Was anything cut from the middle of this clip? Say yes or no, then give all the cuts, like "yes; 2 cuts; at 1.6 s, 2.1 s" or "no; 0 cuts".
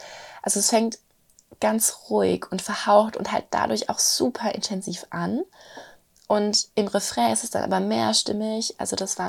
no; 0 cuts